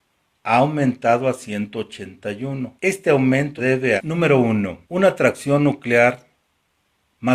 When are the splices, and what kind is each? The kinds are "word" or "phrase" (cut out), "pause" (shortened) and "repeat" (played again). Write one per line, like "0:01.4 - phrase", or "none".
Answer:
0:02.8 - pause
0:03.6 - word
0:04.0 - word
0:04.8 - pause